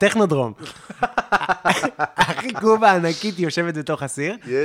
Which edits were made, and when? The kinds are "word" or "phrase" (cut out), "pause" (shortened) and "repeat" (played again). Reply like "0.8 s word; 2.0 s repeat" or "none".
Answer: none